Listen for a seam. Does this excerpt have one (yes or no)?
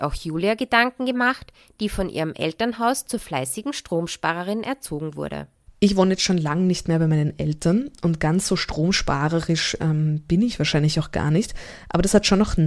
no